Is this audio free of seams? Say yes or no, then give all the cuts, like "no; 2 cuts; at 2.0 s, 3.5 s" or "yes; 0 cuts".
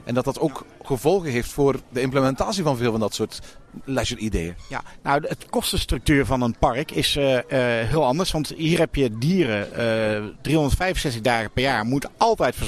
yes; 0 cuts